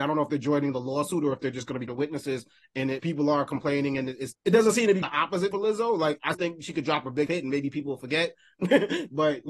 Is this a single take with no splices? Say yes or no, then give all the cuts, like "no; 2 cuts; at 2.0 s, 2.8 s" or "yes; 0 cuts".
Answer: no; 7 cuts; at 1.9 s, 3.0 s, 4.3 s, 5.0 s, 5.5 s, 6.3 s, 7.3 s